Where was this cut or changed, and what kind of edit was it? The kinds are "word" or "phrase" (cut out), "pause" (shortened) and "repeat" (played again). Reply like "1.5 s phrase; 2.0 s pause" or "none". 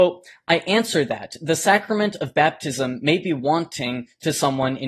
none